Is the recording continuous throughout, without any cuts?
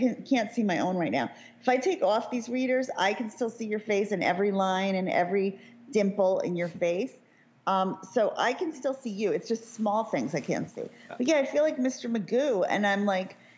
yes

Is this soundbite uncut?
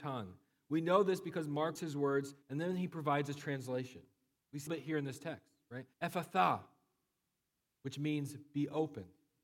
no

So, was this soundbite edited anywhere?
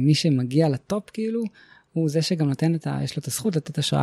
no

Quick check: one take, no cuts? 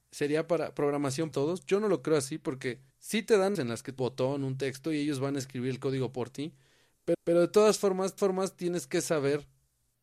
no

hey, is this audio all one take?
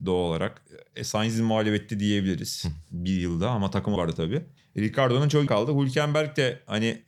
no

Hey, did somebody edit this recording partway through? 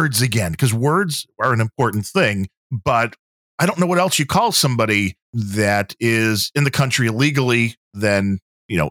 yes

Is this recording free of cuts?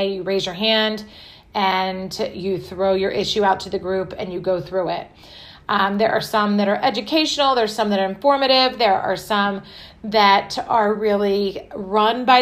yes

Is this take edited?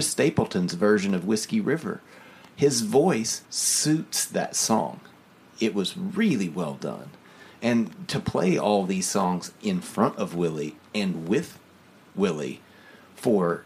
yes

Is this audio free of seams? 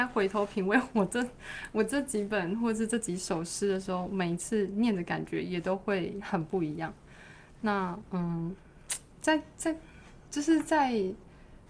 yes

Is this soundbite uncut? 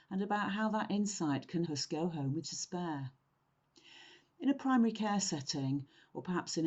no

